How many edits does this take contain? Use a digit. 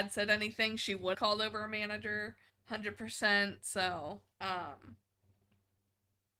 3